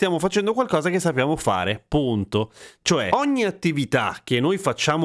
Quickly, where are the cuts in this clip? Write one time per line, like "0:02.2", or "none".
none